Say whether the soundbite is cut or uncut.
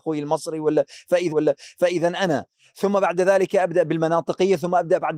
cut